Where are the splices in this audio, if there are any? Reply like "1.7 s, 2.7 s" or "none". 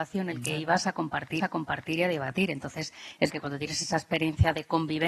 1.4 s, 3.3 s